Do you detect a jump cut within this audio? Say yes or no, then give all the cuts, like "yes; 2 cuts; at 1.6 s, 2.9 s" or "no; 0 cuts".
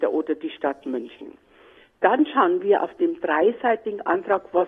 no; 0 cuts